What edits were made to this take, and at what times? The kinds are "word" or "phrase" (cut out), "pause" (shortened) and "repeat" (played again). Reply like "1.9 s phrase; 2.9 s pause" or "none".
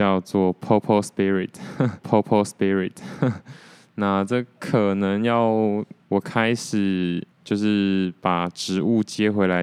2.0 s repeat; 6.0 s pause; 7.3 s pause